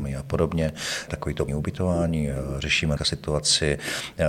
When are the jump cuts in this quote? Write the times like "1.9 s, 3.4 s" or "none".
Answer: 1.1 s, 1.5 s, 3.0 s